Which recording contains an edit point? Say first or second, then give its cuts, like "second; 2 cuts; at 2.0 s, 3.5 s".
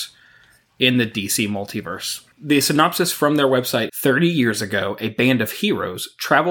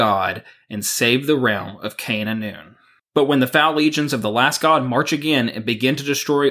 first; 2 cuts; at 2.3 s, 3.9 s